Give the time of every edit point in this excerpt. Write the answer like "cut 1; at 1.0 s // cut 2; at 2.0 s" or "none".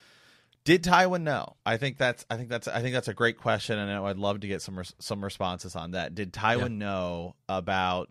cut 1; at 1.6 s